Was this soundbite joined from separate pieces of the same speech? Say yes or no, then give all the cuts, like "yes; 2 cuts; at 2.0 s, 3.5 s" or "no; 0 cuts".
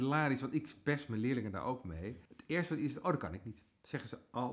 yes; 1 cut; at 2.3 s